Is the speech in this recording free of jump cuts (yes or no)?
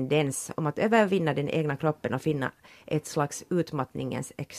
yes